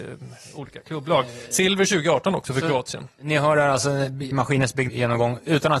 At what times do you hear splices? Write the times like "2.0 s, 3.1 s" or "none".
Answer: 4.3 s, 4.9 s

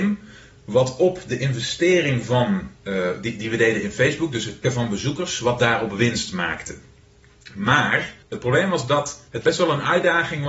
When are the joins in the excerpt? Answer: 2.8 s, 4.6 s, 8.2 s, 9.3 s

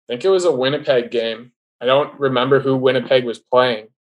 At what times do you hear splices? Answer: 1.6 s

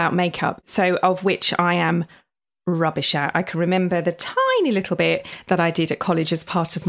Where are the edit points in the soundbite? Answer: none

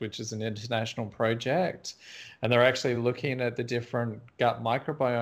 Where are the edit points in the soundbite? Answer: none

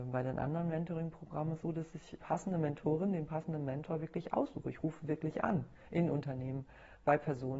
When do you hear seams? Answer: 1.6 s, 2.2 s

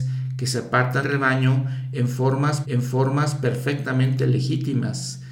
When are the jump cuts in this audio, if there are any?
1.0 s, 2.6 s

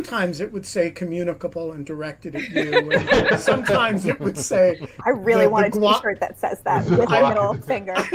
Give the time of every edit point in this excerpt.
none

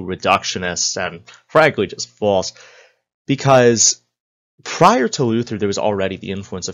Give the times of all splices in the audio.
none

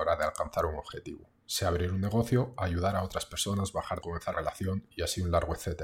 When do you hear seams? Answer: 2.6 s, 4.0 s, 4.3 s

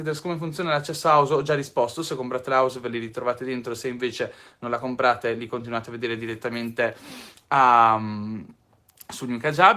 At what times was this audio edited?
none

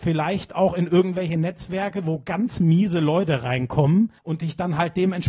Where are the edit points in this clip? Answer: 4.2 s

